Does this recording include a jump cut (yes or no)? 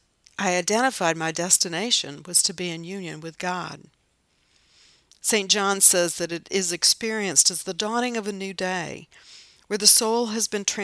no